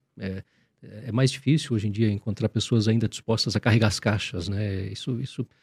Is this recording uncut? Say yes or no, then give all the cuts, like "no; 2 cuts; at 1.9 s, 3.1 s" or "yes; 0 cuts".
yes; 0 cuts